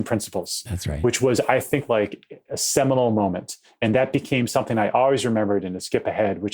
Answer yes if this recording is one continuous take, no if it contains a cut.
yes